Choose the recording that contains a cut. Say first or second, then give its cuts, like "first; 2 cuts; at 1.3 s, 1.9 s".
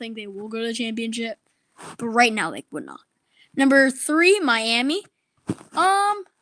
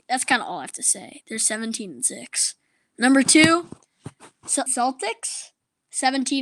second; 1 cut; at 4.7 s